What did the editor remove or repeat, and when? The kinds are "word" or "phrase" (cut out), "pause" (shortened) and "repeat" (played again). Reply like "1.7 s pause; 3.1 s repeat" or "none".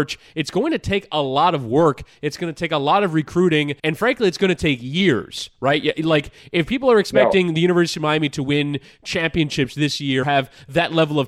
3.8 s pause; 10.2 s word